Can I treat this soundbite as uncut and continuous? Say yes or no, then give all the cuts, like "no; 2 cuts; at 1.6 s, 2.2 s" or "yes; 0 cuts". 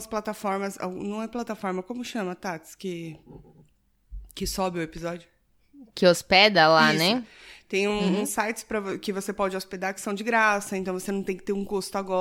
yes; 0 cuts